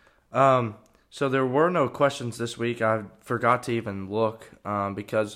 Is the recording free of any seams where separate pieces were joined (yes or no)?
yes